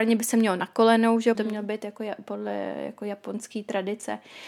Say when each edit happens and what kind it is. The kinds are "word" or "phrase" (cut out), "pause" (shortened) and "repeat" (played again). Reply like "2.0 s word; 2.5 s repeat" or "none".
1.3 s phrase